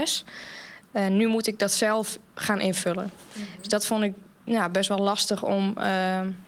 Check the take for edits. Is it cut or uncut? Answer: uncut